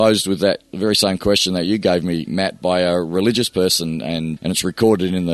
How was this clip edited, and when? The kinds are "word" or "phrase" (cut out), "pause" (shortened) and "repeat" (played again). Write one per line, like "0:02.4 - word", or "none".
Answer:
0:02.3 - word
0:04.4 - word